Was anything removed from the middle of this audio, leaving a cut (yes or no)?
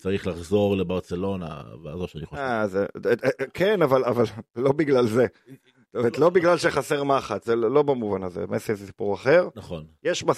yes